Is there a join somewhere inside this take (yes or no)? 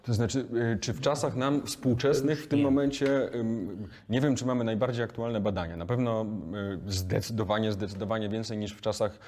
no